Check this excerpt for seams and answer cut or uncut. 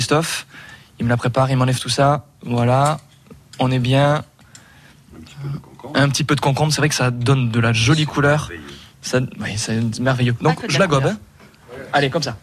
uncut